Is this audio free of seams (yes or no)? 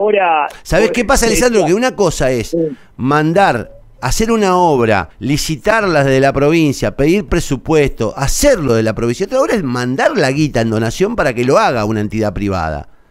no